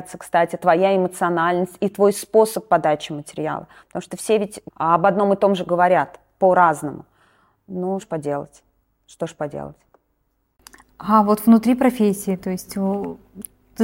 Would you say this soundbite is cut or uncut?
cut